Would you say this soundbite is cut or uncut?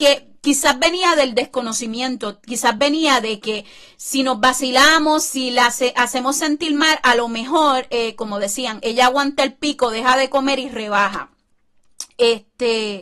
uncut